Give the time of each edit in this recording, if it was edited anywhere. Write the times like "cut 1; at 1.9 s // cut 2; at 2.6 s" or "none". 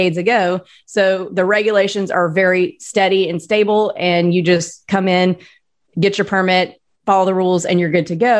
none